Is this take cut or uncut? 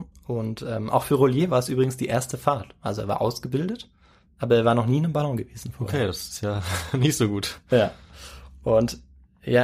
uncut